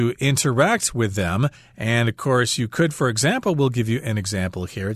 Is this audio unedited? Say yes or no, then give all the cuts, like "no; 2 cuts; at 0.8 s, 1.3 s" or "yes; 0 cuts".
no; 1 cut; at 1.6 s